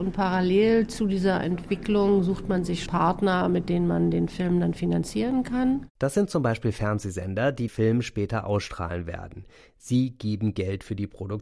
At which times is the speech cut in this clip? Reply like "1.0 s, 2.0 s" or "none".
2.9 s, 7.7 s